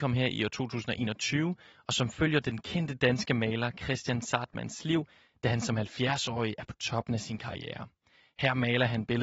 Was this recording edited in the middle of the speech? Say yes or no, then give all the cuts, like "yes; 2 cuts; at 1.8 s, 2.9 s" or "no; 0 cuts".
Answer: no; 0 cuts